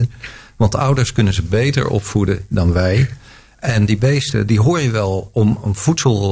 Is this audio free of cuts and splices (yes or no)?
yes